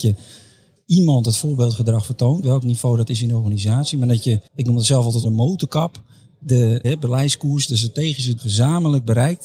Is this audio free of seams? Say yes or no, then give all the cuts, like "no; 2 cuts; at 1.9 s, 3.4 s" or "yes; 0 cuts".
no; 5 cuts; at 2.4 s, 4.5 s, 5.2 s, 6.8 s, 8.4 s